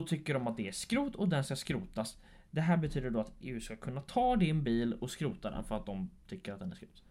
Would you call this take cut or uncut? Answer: uncut